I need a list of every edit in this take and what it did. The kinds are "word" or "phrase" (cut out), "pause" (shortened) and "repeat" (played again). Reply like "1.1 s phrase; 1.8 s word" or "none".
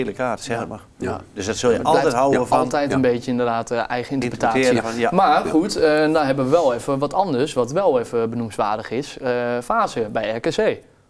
none